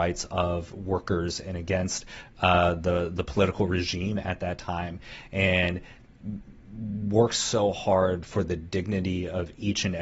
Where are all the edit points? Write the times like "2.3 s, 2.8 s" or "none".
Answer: none